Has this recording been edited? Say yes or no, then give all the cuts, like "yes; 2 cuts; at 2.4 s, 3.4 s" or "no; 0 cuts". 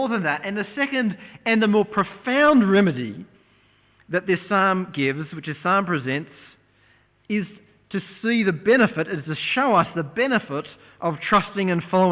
no; 0 cuts